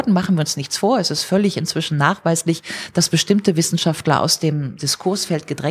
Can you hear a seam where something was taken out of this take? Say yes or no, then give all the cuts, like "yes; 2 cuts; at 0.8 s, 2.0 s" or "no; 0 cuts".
no; 0 cuts